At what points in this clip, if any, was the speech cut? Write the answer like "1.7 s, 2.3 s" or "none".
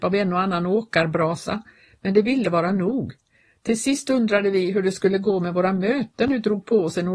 2.4 s